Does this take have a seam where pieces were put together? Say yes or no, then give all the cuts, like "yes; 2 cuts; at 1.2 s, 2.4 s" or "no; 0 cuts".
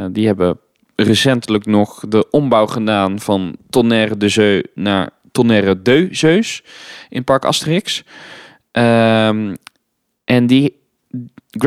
no; 0 cuts